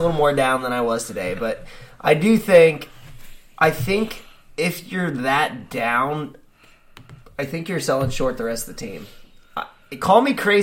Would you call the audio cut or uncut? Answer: uncut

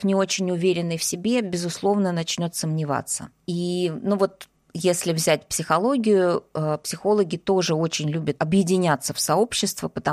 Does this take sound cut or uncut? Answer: cut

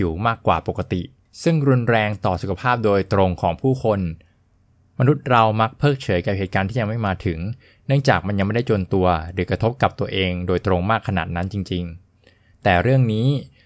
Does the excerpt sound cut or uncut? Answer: uncut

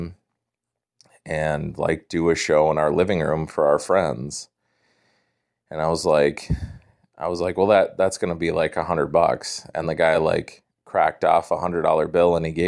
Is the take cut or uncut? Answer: uncut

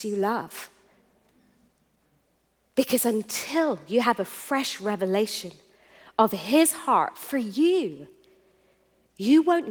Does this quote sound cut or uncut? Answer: uncut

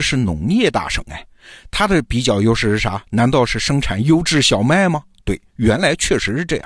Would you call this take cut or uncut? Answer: uncut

